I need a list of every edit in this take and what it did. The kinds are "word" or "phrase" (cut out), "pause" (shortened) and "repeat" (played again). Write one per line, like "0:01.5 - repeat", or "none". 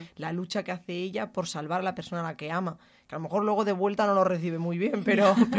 none